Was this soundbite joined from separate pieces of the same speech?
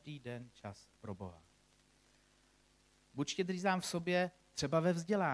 no; 0 cuts

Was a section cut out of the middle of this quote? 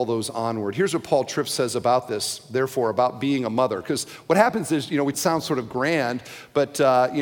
yes; 1 cut; at 5.1 s

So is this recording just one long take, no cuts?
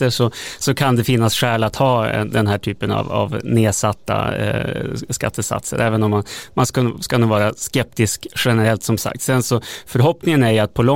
yes; 0 cuts

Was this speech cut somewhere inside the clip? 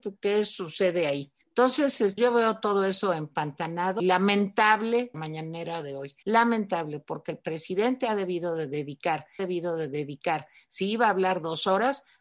yes; 6 cuts; at 1.4 s, 2.2 s, 4.0 s, 5.1 s, 6.2 s, 9.4 s

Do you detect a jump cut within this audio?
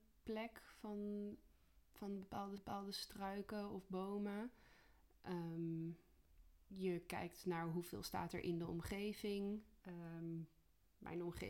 yes; 2 cuts; at 2.6 s, 6.6 s

